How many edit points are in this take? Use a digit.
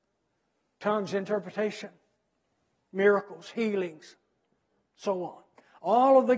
0